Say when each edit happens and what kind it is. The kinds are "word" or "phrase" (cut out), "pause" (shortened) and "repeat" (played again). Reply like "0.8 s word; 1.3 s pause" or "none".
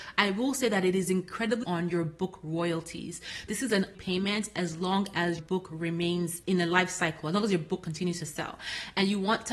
1.6 s phrase; 3.5 s word; 3.9 s word; 5.4 s word; 6.4 s word